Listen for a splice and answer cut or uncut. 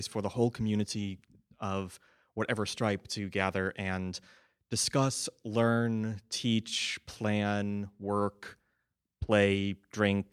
uncut